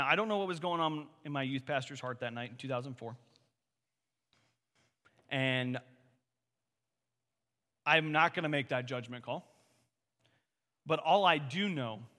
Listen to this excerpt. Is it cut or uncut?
uncut